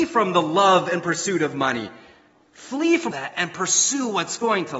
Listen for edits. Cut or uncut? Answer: cut